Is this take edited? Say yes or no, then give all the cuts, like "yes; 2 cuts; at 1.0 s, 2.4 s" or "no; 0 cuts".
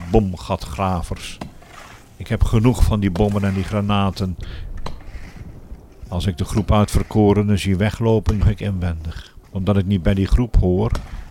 yes; 2 cuts; at 8.4 s, 9.4 s